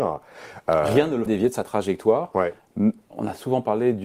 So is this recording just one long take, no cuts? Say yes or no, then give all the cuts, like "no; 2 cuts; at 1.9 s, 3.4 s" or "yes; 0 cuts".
no; 1 cut; at 1.3 s